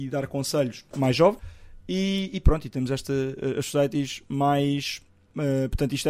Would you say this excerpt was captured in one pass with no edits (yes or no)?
no